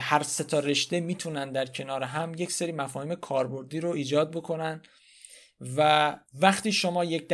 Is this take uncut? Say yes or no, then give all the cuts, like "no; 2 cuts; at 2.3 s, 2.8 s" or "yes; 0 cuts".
no; 1 cut; at 6.2 s